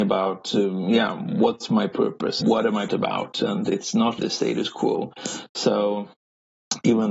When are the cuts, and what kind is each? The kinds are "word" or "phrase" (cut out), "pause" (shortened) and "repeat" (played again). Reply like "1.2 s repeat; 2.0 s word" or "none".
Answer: 2.4 s word; 2.9 s word; 4.2 s word